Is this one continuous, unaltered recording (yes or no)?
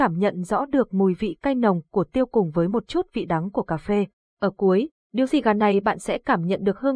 yes